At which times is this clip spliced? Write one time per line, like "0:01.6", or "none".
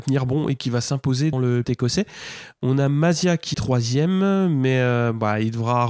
0:01.3
0:01.6
0:03.5

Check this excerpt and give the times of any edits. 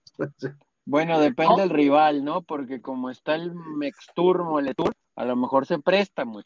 0:05.0

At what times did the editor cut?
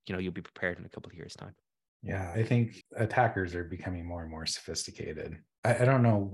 0:02.3
0:02.8

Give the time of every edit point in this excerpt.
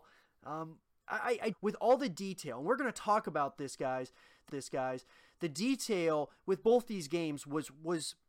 0:01.5
0:04.5

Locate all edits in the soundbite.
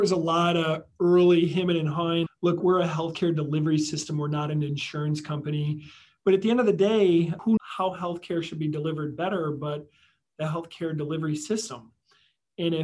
0:02.3
0:02.6
0:07.6

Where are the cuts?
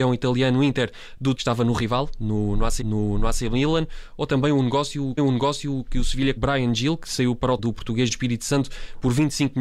0:01.3
0:02.8
0:05.2
0:06.4
0:07.6
0:08.1

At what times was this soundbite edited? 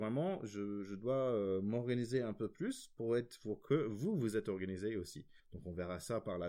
0:05.4

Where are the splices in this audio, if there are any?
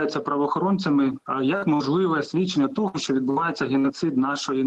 none

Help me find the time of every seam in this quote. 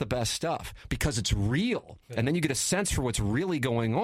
none

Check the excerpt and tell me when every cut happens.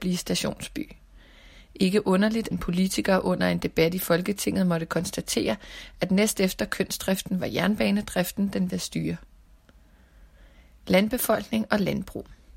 0:02.5
0:08.7

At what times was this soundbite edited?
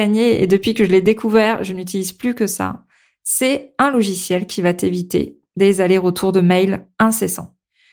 none

